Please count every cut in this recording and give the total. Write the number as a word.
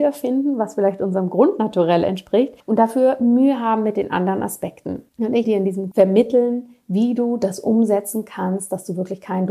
four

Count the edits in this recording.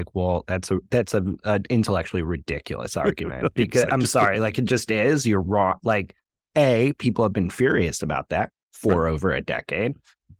zero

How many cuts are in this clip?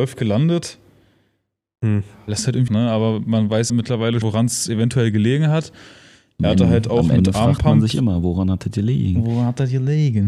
three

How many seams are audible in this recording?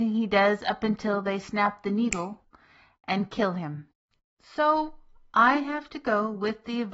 zero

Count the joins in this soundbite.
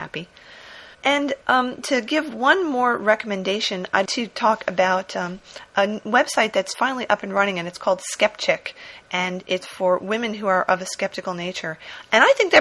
three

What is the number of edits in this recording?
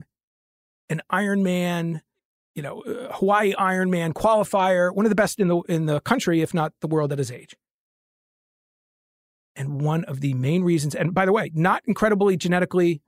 zero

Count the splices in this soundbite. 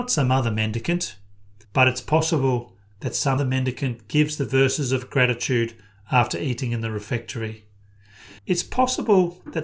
three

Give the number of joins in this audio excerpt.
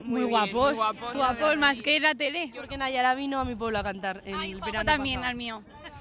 one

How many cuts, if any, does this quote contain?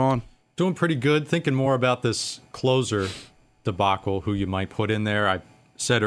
zero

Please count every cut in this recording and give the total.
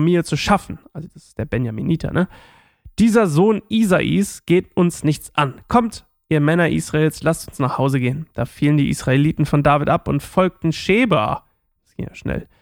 zero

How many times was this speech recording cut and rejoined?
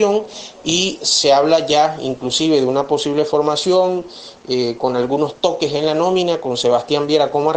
zero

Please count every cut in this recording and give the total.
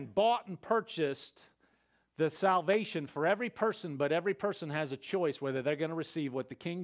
zero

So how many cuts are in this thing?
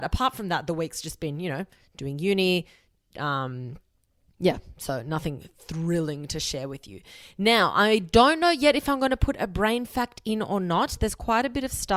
zero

